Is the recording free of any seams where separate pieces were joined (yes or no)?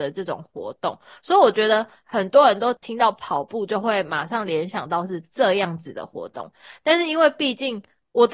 yes